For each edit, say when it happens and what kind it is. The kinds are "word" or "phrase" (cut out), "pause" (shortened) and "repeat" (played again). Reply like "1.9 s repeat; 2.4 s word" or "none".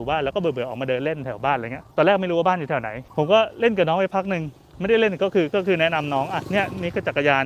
1.9 s pause; 3.1 s pause